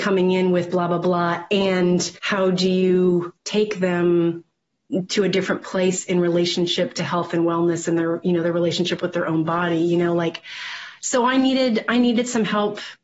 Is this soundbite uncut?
no; 2 cuts; at 2.2 s, 3.4 s

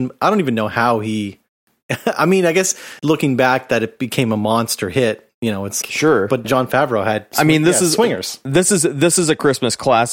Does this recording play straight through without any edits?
no; 3 cuts; at 3.0 s, 5.8 s, 6.4 s

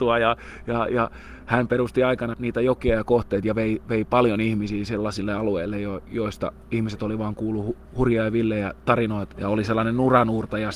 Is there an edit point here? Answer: yes; 3 cuts; at 2.3 s, 7.8 s, 9.3 s

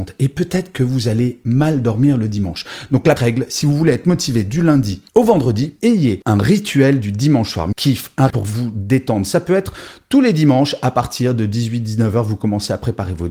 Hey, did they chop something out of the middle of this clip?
yes; 4 cuts; at 3.2 s, 5.1 s, 7.7 s, 8.3 s

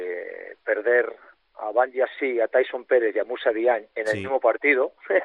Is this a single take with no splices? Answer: yes; 0 cuts

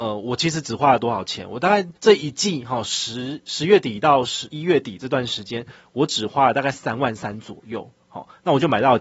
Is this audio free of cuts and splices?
no; 1 cut; at 2.0 s

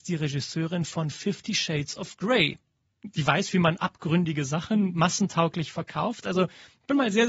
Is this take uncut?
yes; 0 cuts

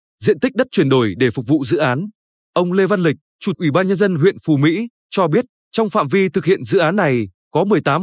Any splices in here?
yes; 1 cut; at 3.5 s

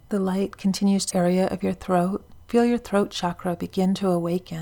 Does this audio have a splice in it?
yes; 2 cuts; at 1.1 s, 2.4 s

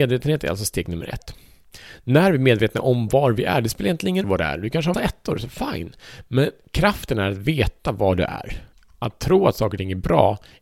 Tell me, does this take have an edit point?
yes; 3 cuts; at 4.2 s, 4.9 s, 8.7 s

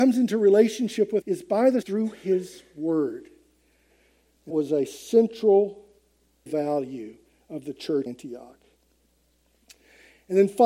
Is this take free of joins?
no; 5 cuts; at 1.2 s, 1.8 s, 4.5 s, 6.5 s, 8.1 s

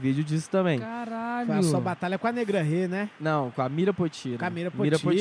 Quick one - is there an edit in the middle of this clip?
no; 0 cuts

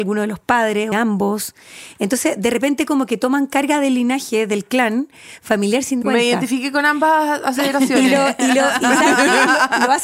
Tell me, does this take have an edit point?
yes; 2 cuts; at 0.9 s, 6.0 s

